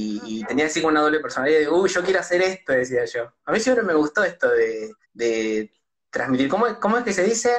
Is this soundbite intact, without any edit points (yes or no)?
no